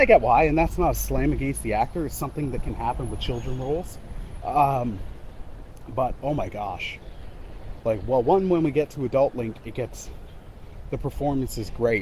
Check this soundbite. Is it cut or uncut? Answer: uncut